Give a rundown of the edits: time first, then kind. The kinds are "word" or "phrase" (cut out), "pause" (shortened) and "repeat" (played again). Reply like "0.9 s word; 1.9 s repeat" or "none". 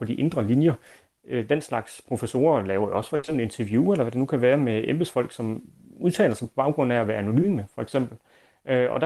none